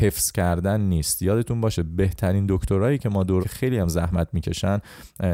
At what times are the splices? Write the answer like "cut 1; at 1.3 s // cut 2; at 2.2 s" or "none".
cut 1; at 3.4 s